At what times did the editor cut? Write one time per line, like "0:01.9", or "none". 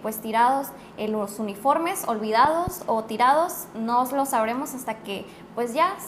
none